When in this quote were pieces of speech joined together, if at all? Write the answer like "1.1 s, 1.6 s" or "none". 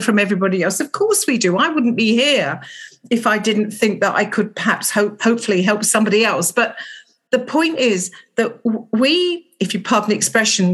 none

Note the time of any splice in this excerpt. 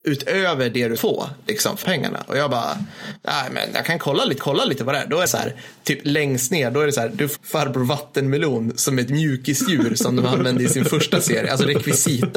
1.0 s, 1.8 s, 4.4 s, 5.3 s, 7.4 s

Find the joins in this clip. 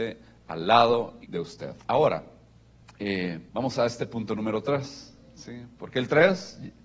1.2 s, 1.8 s, 3.5 s

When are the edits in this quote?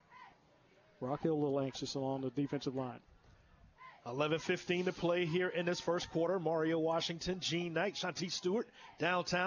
none

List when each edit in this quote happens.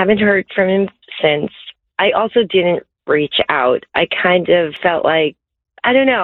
none

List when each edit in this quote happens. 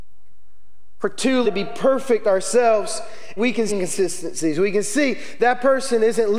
1.4 s, 3.4 s, 3.7 s

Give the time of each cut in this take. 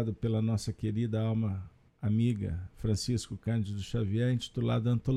1.9 s

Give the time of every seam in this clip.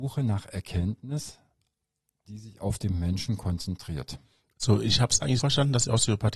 5.4 s

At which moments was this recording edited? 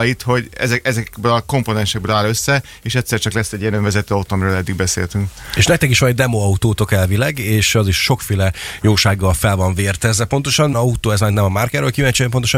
10.7 s

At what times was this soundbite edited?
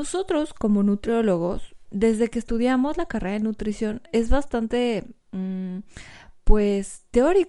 1.8 s

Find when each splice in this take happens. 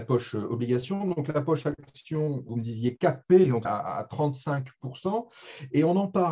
2.5 s, 3.6 s

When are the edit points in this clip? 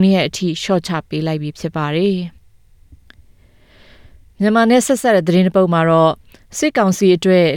2.4 s

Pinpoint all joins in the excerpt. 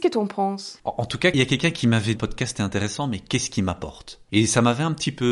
2.2 s

